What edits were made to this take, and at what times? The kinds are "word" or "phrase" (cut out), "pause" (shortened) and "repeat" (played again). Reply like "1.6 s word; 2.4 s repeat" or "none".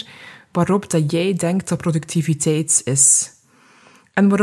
none